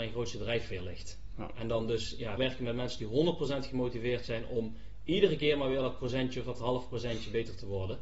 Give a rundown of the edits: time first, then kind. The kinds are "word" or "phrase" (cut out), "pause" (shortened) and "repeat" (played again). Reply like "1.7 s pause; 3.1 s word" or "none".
2.4 s word